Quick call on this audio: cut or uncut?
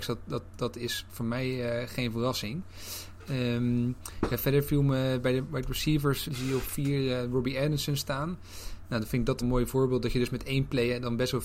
cut